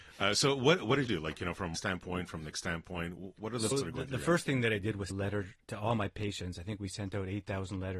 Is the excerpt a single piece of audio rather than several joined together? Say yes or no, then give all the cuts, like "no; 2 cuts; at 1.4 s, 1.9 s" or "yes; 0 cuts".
no; 6 cuts; at 1.1 s, 1.7 s, 2.5 s, 3.7 s, 5.1 s, 5.6 s